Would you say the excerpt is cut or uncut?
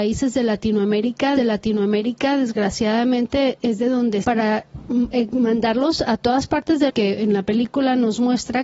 cut